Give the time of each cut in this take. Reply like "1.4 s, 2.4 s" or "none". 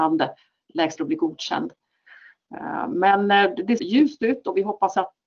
1.0 s, 3.8 s